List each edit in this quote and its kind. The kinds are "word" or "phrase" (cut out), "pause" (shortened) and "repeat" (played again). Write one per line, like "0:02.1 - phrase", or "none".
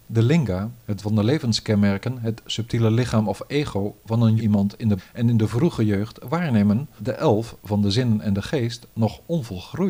0:01.0 - word
0:04.4 - word
0:05.0 - word
0:07.0 - word